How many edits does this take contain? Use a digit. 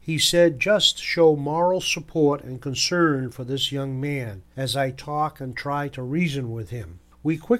0